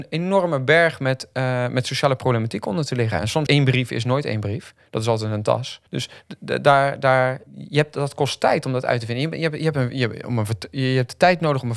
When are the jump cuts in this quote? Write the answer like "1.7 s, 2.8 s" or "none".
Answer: 3.5 s, 5.9 s, 7.5 s